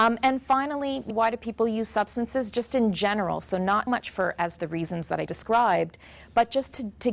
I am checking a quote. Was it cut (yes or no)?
yes